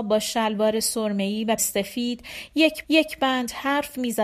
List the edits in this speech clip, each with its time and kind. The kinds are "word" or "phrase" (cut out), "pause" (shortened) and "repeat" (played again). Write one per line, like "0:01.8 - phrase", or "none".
0:01.6 - word
0:02.8 - repeat

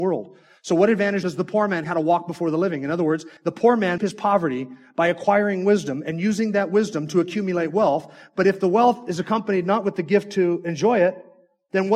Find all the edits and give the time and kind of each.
0:01.2 - word
0:01.8 - phrase
0:03.4 - pause
0:04.0 - phrase

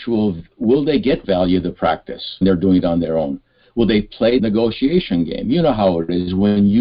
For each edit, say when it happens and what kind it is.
0:01.2 - phrase
0:02.4 - word
0:04.4 - phrase

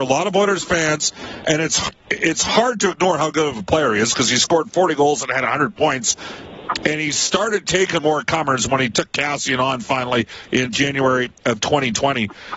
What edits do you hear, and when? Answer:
0:08.0 - word
0:10.7 - word

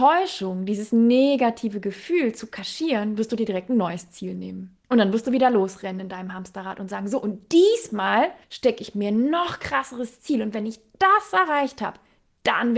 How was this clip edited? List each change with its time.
0:04.8 - pause
0:08.4 - pause

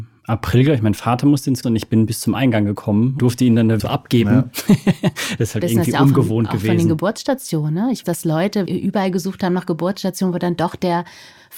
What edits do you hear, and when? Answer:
0:01.6 - word
0:03.2 - word
0:03.8 - word
0:05.6 - word
0:08.0 - word
0:08.7 - word

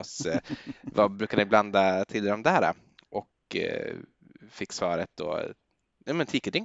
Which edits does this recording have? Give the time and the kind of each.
none

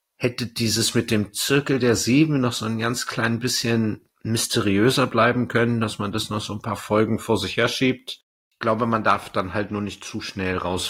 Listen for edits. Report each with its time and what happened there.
0:04.1 - pause

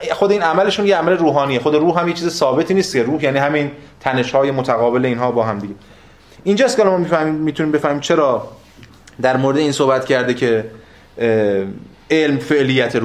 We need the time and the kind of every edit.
none

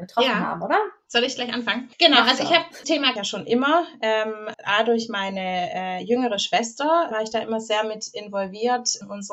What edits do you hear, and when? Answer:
0:02.8 - word
0:03.2 - phrase
0:04.5 - word
0:07.1 - word

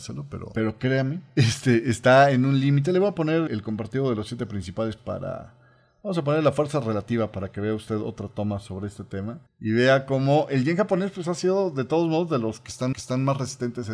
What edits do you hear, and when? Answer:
0:01.3 - pause
0:03.5 - word
0:05.0 - word
0:09.5 - pause
0:12.9 - repeat

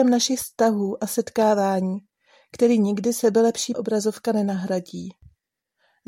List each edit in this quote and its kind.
0:03.7 - word

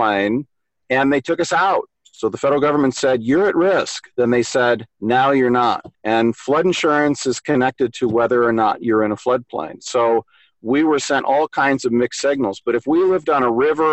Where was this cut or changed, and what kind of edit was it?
0:01.9 - pause
0:04.9 - pause
0:05.9 - pause

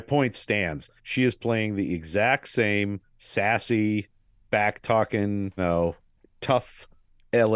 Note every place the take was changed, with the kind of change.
0:01.0 - pause
0:03.1 - pause
0:05.6 - word

